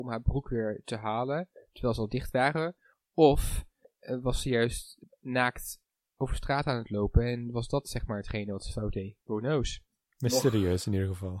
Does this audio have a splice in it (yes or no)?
yes